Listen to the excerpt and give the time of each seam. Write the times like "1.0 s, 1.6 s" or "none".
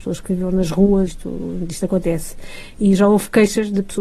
1.1 s